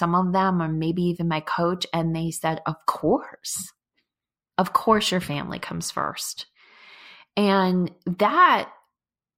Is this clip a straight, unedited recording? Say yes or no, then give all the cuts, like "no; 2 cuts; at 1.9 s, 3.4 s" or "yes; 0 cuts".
yes; 0 cuts